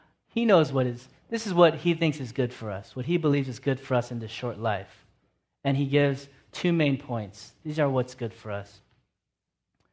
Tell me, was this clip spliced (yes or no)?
no